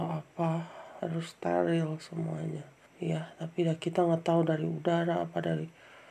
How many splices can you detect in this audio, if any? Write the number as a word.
one